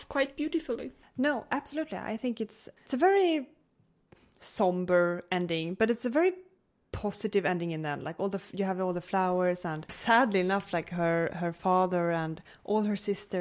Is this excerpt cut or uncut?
uncut